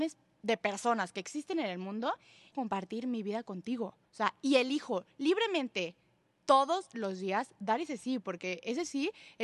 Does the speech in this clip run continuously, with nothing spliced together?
no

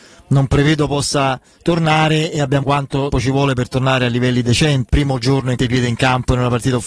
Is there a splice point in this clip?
yes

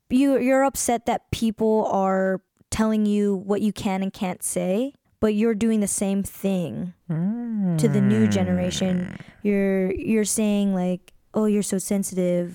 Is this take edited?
yes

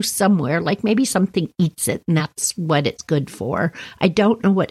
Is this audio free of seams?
yes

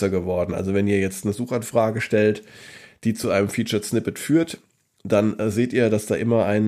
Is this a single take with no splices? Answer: yes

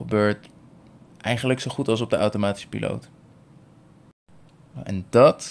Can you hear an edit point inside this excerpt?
no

